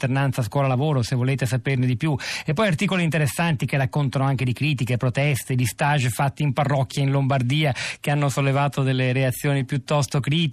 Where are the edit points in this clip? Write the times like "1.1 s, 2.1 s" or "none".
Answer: none